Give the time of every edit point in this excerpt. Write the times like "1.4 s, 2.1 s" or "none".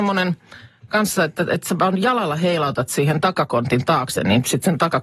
none